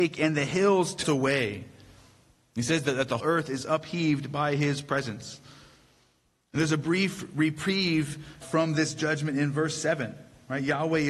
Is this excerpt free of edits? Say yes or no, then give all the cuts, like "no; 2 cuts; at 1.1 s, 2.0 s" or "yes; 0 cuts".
no; 3 cuts; at 1.0 s, 3.2 s, 8.4 s